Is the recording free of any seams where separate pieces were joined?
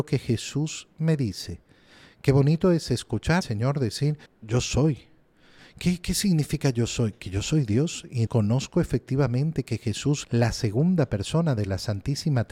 no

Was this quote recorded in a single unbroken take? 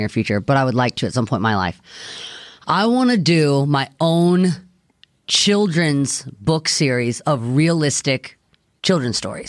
yes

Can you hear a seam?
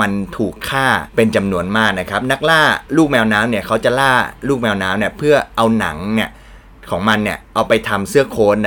yes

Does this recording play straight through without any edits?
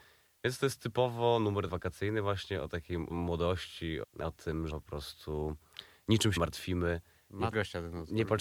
no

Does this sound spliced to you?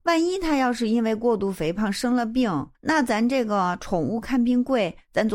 yes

